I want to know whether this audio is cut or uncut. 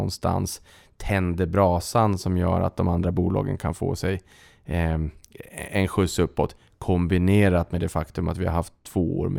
uncut